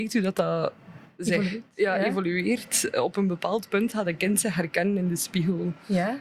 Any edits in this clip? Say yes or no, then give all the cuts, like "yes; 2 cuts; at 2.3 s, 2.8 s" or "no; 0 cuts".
no; 0 cuts